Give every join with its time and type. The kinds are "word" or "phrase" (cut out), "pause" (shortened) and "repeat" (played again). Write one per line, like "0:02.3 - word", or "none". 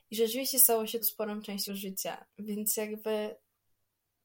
0:01.0 - word
0:01.7 - word
0:02.3 - pause